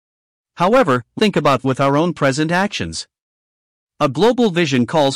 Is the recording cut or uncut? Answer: cut